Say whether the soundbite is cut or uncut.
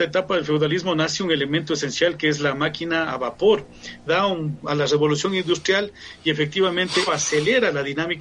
cut